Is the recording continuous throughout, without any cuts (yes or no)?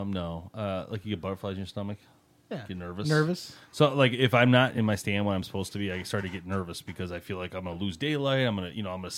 yes